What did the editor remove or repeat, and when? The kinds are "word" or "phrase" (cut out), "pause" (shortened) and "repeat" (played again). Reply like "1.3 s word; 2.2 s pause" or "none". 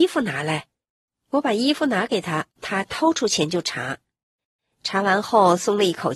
2.5 s pause